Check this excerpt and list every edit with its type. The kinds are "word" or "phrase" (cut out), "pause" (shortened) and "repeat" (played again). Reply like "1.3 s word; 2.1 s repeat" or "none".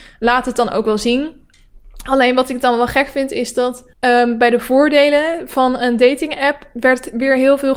3.9 s pause